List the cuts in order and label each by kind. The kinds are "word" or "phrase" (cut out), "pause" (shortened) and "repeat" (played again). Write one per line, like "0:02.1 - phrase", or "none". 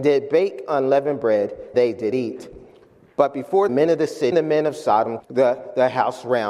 0:01.7 - word
0:03.7 - phrase
0:04.3 - word
0:05.2 - word